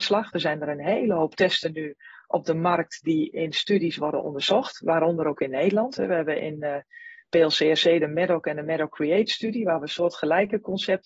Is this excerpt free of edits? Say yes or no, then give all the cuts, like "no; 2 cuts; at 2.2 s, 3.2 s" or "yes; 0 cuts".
yes; 0 cuts